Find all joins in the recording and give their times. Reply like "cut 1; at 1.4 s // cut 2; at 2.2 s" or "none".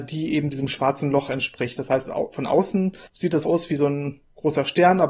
cut 1; at 3.1 s // cut 2; at 3.4 s